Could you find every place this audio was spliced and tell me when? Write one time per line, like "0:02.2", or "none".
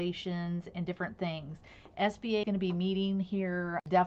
0:02.4